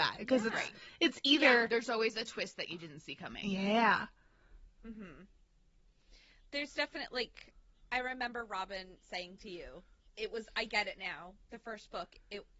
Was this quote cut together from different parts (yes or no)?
no